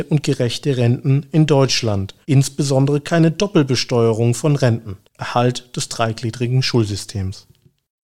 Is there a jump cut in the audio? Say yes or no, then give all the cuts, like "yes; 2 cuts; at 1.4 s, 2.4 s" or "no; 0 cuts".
yes; 2 cuts; at 2.2 s, 5.1 s